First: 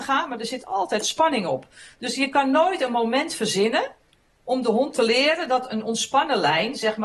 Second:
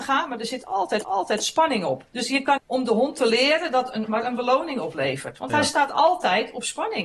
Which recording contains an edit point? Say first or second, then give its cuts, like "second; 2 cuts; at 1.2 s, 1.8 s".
second; 4 cuts; at 1.0 s, 2.1 s, 2.6 s, 4.1 s